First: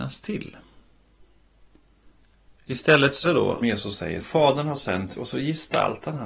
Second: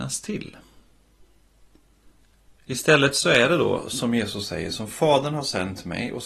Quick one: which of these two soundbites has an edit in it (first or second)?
first